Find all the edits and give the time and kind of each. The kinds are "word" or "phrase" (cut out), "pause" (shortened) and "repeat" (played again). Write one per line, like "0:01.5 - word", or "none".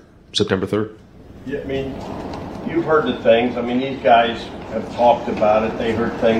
none